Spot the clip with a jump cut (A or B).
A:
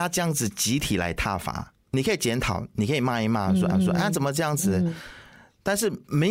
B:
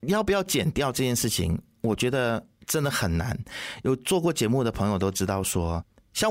A